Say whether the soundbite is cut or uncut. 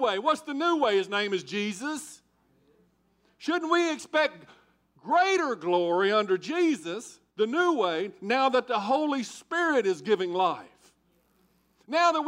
uncut